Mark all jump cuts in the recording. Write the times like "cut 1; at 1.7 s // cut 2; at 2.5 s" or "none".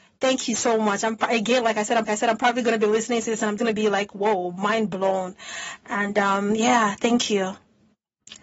cut 1; at 2.1 s // cut 2; at 3.6 s